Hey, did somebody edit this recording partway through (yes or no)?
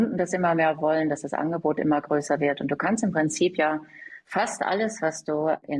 no